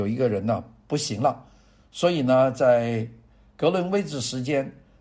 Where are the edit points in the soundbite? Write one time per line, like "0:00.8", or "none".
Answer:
none